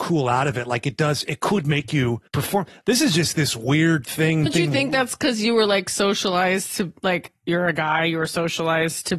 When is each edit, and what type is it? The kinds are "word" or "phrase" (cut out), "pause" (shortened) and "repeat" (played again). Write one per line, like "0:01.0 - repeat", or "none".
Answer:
0:02.3 - pause
0:04.5 - phrase